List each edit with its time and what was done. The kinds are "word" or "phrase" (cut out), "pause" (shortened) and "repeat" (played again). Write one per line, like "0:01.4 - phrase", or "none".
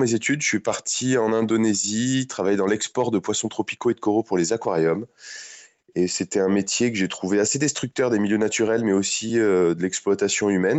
none